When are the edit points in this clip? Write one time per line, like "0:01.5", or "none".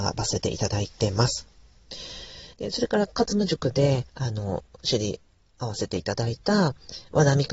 0:02.5
0:04.1